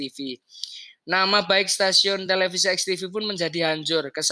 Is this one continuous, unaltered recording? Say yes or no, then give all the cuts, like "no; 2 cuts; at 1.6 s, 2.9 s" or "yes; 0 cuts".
yes; 0 cuts